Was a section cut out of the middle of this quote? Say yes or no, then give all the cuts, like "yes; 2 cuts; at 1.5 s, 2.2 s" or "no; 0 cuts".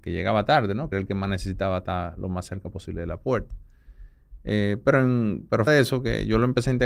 yes; 2 cuts; at 0.9 s, 5.7 s